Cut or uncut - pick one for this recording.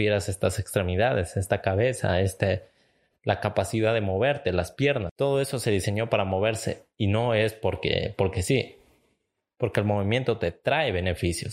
uncut